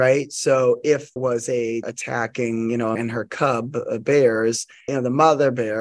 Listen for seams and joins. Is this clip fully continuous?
no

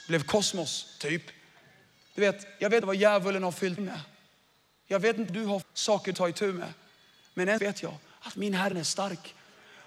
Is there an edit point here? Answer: yes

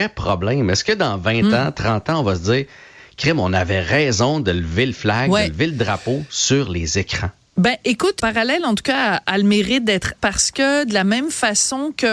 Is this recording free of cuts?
no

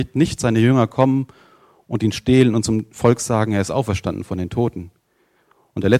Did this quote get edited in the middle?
no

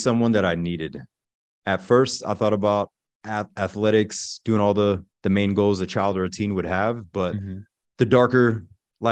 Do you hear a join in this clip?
yes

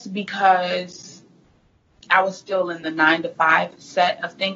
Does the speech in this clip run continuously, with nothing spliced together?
yes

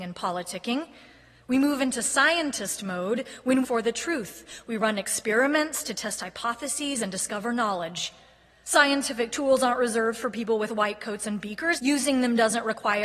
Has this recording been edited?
yes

